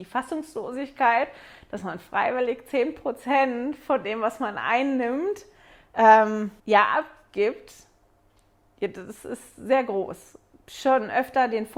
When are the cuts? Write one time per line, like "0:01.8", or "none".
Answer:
0:06.6